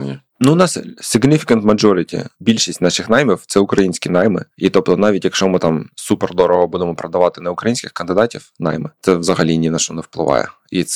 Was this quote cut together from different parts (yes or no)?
no